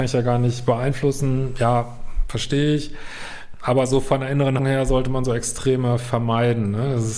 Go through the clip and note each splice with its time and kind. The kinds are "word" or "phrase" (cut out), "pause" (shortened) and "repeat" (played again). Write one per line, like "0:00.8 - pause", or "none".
0:04.6 - word